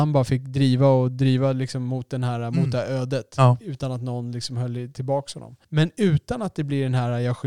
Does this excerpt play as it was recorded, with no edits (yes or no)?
no